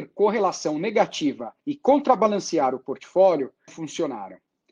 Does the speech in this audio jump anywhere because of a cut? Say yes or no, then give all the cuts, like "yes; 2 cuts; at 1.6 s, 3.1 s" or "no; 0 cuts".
yes; 2 cuts; at 1.6 s, 3.7 s